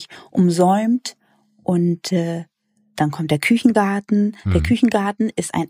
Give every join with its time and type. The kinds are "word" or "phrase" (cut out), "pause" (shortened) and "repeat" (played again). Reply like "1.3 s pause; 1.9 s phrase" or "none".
none